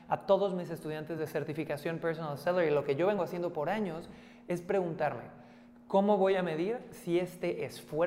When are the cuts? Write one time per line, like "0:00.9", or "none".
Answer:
none